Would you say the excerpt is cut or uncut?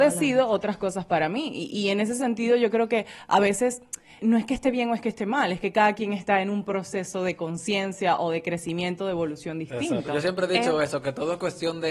cut